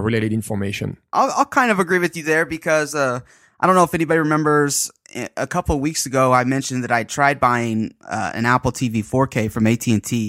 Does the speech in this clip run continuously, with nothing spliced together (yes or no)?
yes